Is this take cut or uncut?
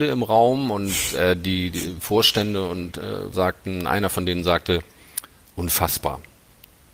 cut